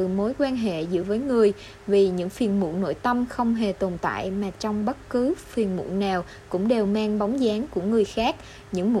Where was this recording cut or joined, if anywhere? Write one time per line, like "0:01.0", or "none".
0:01.0